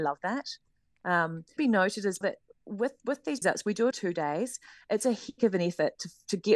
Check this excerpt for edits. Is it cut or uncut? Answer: cut